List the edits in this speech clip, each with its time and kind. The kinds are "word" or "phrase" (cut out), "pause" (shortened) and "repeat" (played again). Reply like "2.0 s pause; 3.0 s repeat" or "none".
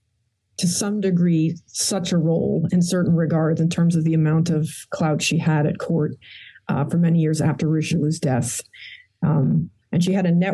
2.7 s word

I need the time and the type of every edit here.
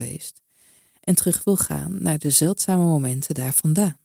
none

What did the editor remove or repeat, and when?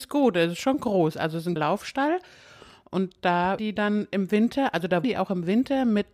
1.6 s word; 3.6 s word; 5.0 s word

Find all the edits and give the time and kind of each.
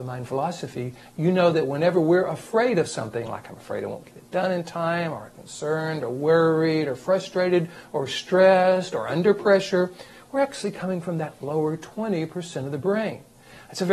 none

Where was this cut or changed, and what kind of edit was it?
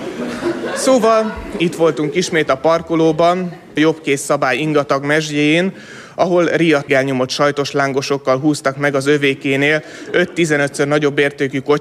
3.8 s word; 6.9 s phrase

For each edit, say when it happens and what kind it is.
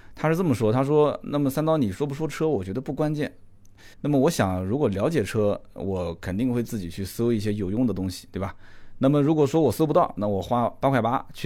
3.9 s pause

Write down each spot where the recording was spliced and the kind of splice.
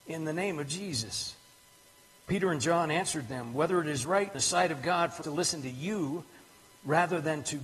4.3 s word; 5.2 s word

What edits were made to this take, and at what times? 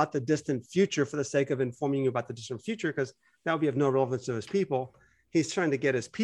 none

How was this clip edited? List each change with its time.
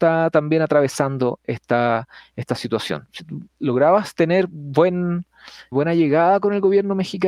3.5 s pause; 5.7 s word

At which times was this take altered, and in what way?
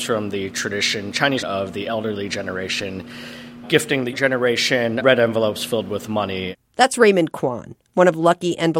1.4 s word; 3.6 s word; 4.1 s word; 5.0 s word

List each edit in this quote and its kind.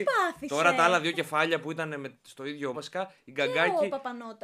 2.7 s word

